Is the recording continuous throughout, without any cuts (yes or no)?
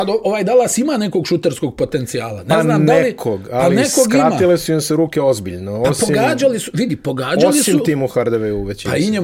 yes